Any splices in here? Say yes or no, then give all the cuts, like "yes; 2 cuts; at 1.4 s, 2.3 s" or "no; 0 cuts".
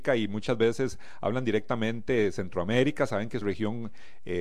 yes; 1 cut; at 3.4 s